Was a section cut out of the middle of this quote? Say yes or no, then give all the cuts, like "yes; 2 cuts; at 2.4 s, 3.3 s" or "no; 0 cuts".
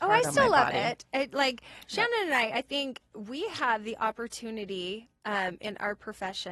no; 0 cuts